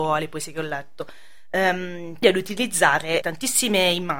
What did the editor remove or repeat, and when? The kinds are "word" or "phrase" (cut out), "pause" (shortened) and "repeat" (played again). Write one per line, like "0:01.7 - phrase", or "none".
0:02.2 - word
0:03.2 - word